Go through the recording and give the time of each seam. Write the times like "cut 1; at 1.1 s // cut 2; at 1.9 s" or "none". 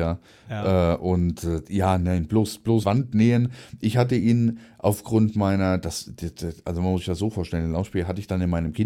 cut 1; at 2.8 s